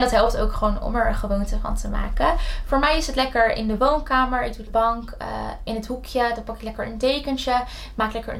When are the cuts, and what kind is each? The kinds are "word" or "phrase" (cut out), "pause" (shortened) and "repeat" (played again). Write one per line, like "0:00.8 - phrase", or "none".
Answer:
0:04.7 - phrase